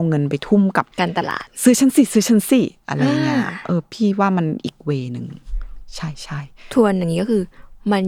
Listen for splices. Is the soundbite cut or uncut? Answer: cut